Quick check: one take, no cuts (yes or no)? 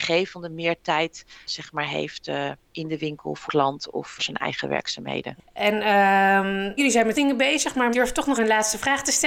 no